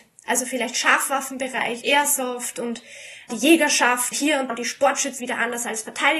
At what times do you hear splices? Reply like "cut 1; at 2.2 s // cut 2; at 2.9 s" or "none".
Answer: cut 1; at 1.8 s // cut 2; at 3.3 s // cut 3; at 4.1 s // cut 4; at 4.5 s // cut 5; at 5.2 s